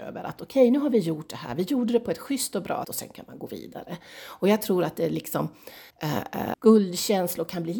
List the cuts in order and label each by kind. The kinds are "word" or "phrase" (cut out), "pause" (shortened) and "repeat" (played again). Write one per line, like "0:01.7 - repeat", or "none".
0:02.8 - word
0:05.9 - pause
0:06.5 - word

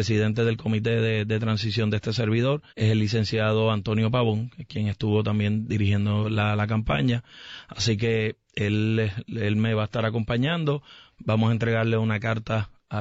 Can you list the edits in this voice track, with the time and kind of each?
0:02.7 - pause

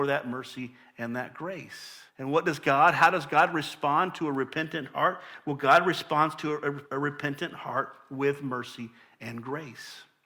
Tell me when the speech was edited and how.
0:02.1 - pause
0:06.8 - pause

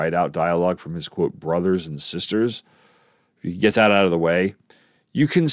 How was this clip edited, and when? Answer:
none

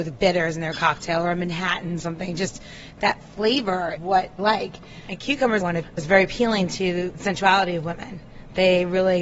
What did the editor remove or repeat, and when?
0:02.0 - word
0:04.0 - word
0:04.4 - word
0:05.6 - word
0:06.0 - word

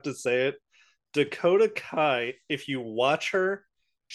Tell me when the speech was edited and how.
none

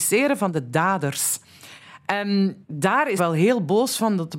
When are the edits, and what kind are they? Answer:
0:02.6 - pause
0:03.2 - word

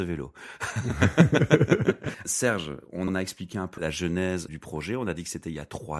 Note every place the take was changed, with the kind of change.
0:02.2 - word
0:03.1 - word
0:03.8 - word
0:04.5 - word

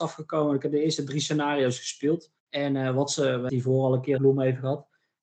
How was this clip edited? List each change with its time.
0:02.4 - pause
0:03.5 - word
0:04.2 - word

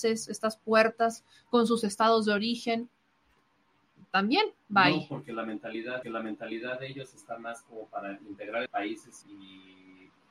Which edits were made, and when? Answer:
0:06.0 - repeat
0:08.7 - word
0:09.2 - word

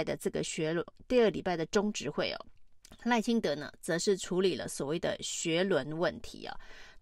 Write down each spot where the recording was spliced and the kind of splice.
0:02.8 - pause

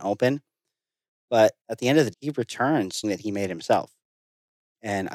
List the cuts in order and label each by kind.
0:01.6 - pause
0:02.1 - word
0:03.0 - phrase

